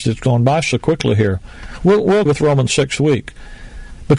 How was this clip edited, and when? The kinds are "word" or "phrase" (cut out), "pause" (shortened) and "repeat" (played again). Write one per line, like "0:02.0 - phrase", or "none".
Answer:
0:02.3 - word
0:03.0 - word